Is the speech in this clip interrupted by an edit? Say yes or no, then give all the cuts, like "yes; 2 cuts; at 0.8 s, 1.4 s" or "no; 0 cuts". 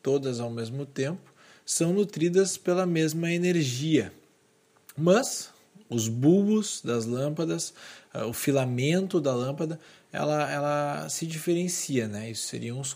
no; 0 cuts